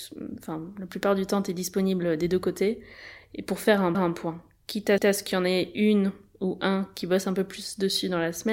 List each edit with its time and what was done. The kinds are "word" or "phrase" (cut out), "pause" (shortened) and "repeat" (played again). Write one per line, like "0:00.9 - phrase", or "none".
0:03.9 - repeat
0:05.0 - repeat